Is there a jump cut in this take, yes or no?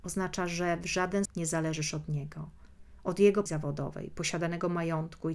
yes